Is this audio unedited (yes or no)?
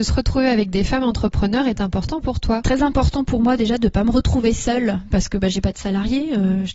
no